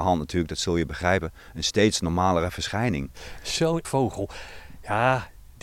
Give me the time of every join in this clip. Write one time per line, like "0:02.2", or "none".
0:03.8